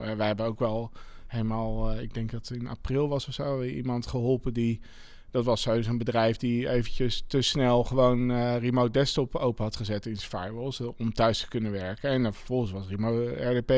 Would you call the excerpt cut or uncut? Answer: uncut